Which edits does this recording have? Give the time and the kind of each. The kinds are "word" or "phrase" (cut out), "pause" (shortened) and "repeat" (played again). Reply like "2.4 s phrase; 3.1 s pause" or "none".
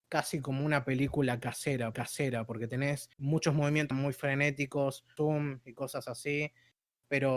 1.9 s repeat; 3.1 s pause; 3.9 s phrase; 5.2 s word